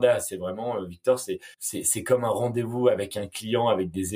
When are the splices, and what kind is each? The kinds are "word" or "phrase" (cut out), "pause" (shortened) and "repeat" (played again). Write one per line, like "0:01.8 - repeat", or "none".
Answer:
0:01.5 - pause
0:03.1 - phrase